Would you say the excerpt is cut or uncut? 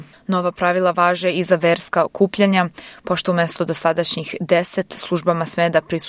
uncut